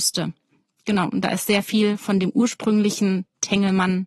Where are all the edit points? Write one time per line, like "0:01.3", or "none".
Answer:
none

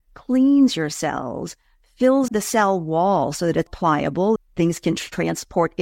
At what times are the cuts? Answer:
0:02.3
0:03.7
0:04.4

